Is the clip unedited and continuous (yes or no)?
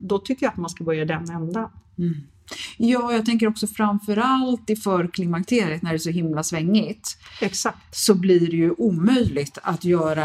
yes